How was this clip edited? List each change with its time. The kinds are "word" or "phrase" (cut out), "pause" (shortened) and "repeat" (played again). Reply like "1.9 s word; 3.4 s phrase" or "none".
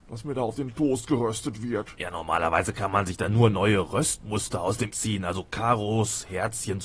4.9 s word